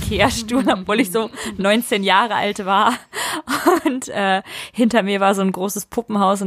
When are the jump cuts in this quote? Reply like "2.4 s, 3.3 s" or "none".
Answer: none